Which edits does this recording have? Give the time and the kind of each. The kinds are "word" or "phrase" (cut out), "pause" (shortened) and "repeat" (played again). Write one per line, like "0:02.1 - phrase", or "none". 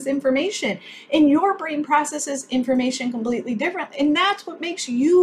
none